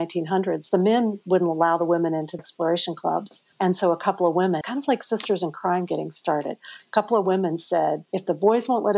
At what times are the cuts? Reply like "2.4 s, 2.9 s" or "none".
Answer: 2.4 s, 3.5 s, 4.6 s, 8.1 s